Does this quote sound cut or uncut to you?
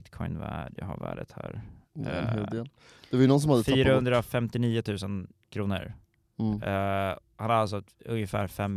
uncut